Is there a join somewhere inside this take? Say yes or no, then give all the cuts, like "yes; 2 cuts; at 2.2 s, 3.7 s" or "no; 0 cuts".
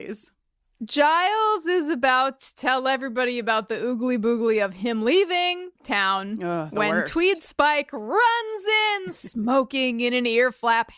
yes; 1 cut; at 5.7 s